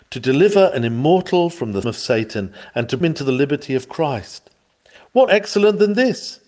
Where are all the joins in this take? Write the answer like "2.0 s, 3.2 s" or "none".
1.8 s, 3.0 s, 5.3 s